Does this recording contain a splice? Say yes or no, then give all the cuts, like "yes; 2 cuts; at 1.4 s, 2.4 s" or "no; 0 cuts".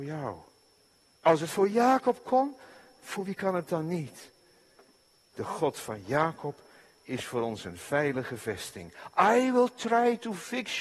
no; 0 cuts